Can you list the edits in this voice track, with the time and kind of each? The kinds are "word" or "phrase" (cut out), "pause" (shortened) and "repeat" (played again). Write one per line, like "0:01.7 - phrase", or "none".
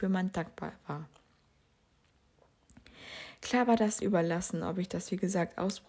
0:04.0 - word